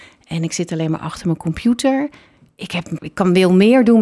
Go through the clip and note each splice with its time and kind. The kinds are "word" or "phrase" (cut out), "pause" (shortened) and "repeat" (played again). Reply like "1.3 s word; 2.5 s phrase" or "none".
3.0 s word